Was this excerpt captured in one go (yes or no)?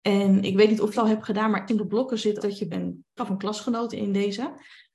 no